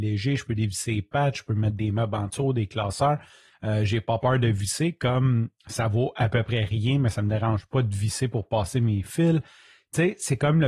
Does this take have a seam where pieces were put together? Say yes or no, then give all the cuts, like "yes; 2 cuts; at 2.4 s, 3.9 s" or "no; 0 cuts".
no; 0 cuts